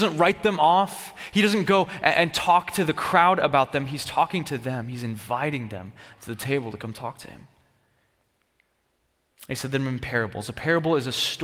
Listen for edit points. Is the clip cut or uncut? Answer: uncut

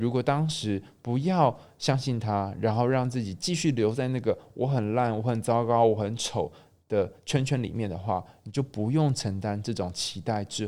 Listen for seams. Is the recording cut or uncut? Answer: uncut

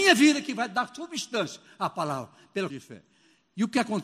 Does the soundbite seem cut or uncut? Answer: cut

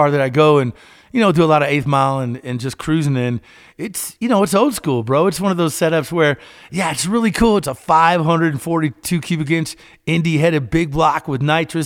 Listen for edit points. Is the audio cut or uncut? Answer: uncut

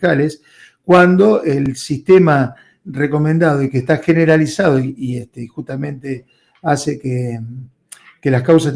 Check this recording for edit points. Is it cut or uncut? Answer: uncut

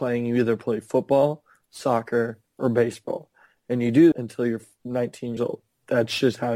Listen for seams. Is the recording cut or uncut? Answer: cut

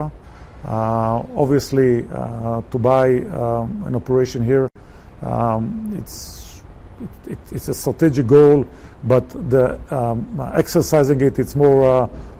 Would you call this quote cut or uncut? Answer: uncut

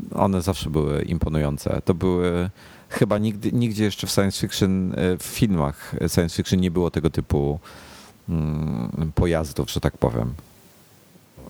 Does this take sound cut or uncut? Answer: uncut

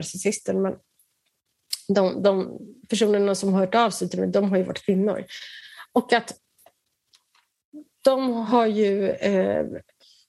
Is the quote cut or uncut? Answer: uncut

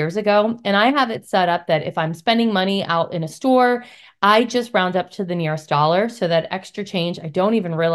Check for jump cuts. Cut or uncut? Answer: uncut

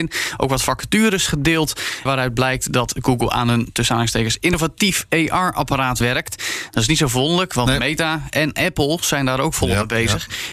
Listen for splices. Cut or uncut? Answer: cut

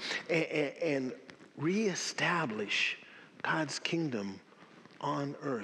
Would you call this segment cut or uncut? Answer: uncut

